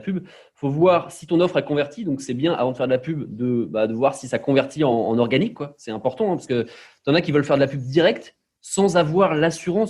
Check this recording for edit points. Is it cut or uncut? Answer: uncut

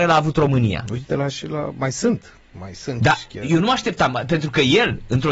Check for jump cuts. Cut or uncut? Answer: uncut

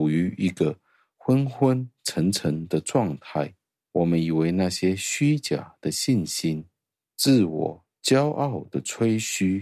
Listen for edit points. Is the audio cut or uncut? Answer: uncut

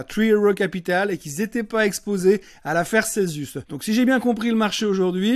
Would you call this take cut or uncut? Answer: uncut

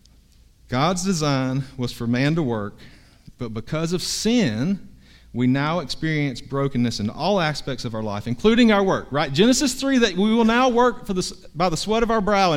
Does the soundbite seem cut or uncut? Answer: uncut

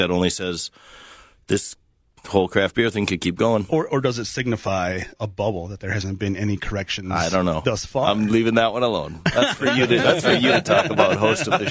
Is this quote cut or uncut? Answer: cut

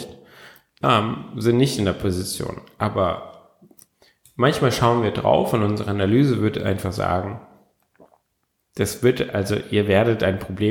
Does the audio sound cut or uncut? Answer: uncut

